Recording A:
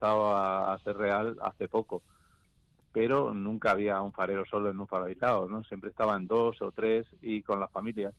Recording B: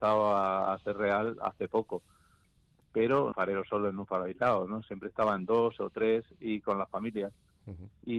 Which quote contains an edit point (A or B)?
B